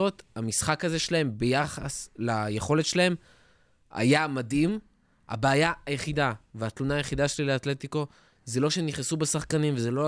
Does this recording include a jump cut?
no; 0 cuts

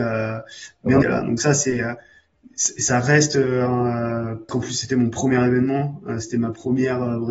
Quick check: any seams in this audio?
yes; 2 cuts; at 1.0 s, 4.5 s

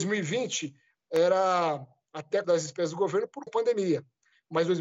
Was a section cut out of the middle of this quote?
yes; 2 cuts; at 2.4 s, 3.5 s

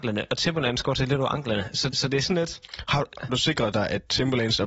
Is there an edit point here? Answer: yes; 2 cuts; at 1.9 s, 3.3 s

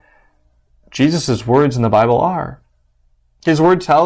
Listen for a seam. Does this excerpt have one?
no; 0 cuts

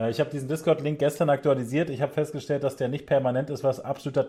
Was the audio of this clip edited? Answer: no; 0 cuts

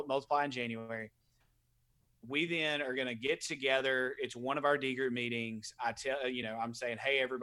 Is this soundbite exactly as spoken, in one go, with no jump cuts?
yes; 0 cuts

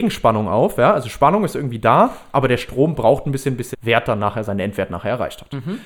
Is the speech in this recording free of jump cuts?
no; 1 cut; at 3.7 s

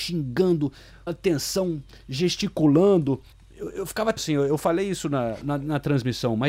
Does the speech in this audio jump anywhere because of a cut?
yes; 4 cuts; at 1.1 s, 3.3 s, 4.2 s, 5.4 s

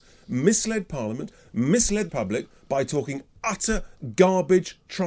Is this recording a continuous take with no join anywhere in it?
no; 1 cut; at 2.1 s

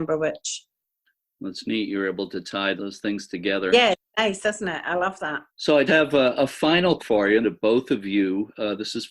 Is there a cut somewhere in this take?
yes; 5 cuts; at 2.8 s, 5.5 s, 5.9 s, 7.0 s, 7.4 s

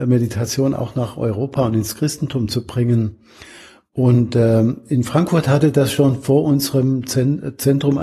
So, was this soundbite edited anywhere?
no; 0 cuts

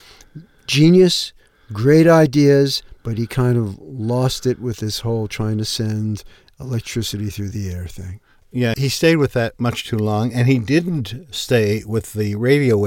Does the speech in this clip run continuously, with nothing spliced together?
yes; 0 cuts

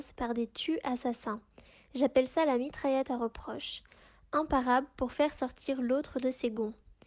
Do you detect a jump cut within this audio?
no; 0 cuts

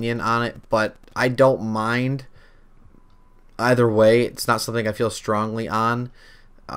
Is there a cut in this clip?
no; 0 cuts

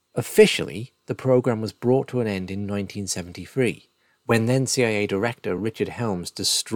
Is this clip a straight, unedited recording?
yes; 0 cuts

